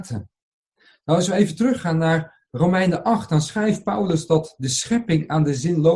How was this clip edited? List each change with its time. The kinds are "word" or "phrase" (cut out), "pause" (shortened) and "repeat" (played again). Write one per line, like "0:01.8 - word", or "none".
none